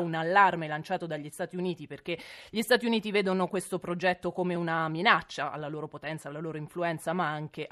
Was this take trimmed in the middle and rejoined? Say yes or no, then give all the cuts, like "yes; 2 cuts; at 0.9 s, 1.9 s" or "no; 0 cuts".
no; 0 cuts